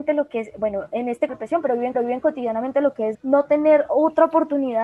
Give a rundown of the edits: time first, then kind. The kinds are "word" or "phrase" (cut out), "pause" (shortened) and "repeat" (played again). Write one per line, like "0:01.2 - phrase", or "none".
0:01.3 - phrase
0:01.9 - repeat
0:03.1 - word